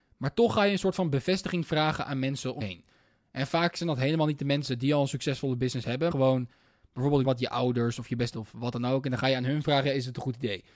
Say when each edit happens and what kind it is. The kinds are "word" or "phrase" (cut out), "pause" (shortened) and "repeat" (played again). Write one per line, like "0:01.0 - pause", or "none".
0:02.6 - word
0:06.1 - word
0:07.2 - word
0:08.3 - word